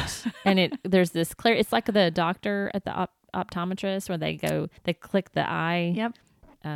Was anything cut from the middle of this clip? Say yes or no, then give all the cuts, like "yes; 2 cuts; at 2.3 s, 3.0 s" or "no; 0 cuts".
yes; 1 cut; at 4.8 s